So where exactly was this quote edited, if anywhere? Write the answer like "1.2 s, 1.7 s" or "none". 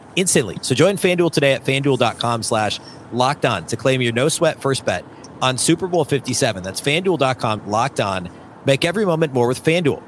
7.6 s

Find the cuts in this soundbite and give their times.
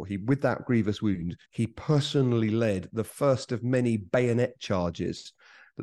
1.4 s

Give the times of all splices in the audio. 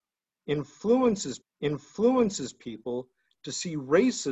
1.4 s

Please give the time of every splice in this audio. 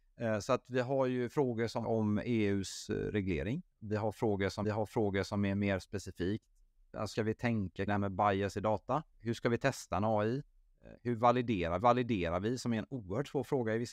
1.8 s, 3.7 s, 4.6 s, 7.1 s, 7.9 s, 9.1 s, 11.8 s

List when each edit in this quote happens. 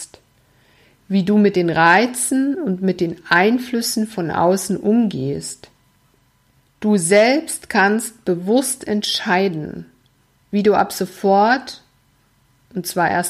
none

